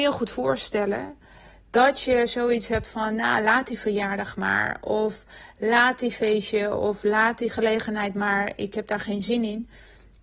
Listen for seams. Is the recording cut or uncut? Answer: uncut